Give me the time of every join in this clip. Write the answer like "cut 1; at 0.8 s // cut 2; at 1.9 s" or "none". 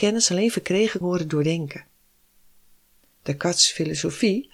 cut 1; at 1.0 s